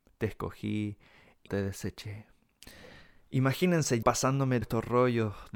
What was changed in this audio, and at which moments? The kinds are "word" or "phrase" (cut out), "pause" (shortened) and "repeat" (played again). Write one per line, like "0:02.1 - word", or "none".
0:01.5 - word
0:04.0 - word
0:04.6 - word